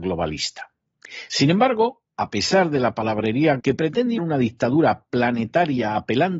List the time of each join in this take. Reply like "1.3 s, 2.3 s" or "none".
3.6 s, 4.2 s